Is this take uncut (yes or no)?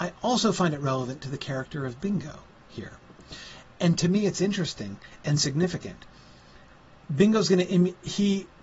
yes